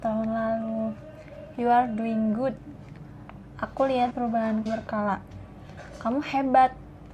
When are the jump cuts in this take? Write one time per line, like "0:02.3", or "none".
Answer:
0:04.1
0:04.7